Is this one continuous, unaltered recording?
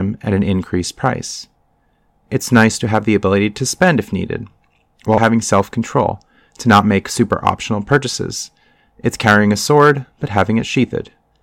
no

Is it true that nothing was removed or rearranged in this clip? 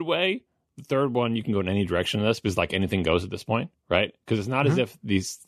yes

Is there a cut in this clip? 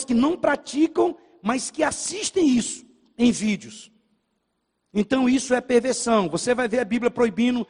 no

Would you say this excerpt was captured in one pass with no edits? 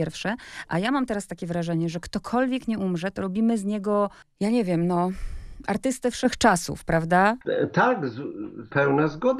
yes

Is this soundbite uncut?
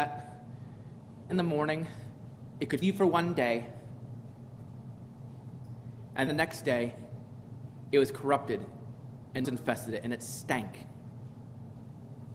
no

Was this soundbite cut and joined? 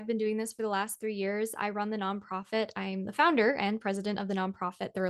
no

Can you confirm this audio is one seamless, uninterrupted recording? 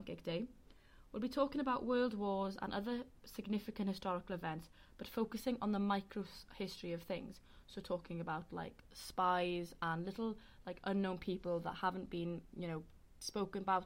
yes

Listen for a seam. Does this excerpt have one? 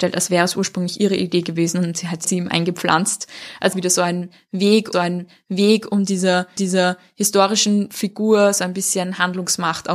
yes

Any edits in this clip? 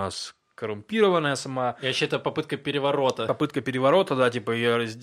no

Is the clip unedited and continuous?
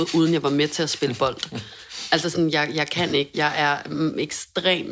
yes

